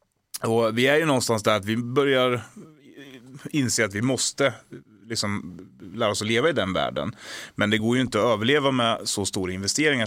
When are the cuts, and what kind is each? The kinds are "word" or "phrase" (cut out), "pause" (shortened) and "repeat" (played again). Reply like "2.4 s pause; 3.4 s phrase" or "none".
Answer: none